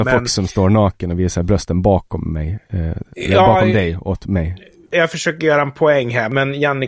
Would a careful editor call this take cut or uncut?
uncut